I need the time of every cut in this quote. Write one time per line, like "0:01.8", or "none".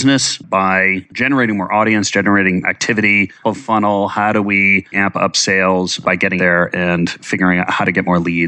0:02.6
0:03.4
0:04.9
0:06.4